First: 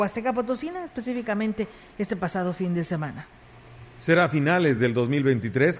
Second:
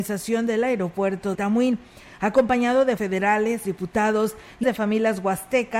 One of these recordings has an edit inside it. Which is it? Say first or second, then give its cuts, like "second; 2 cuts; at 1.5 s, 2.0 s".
second; 4 cuts; at 1.3 s, 3.0 s, 3.6 s, 4.6 s